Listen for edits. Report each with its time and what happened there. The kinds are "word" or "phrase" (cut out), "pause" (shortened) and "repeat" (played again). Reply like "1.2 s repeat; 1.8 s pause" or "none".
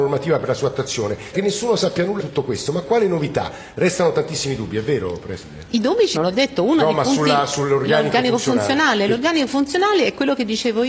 1.3 s word; 2.2 s word; 6.1 s word